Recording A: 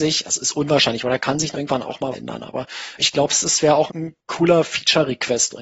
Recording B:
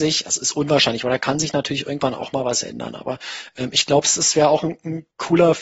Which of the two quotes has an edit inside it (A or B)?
A